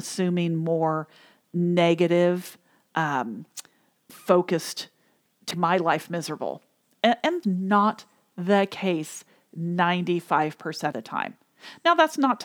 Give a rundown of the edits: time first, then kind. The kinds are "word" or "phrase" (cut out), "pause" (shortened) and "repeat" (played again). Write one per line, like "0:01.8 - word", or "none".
0:04.1 - word
0:05.5 - word
0:07.4 - word
0:10.9 - word